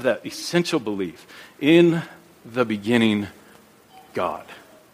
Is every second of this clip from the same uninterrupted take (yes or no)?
yes